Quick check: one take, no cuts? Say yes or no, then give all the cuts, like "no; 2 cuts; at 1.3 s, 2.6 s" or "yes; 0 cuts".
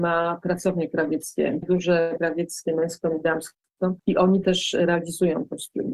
no; 4 cuts; at 1.6 s, 2.2 s, 4.0 s, 4.4 s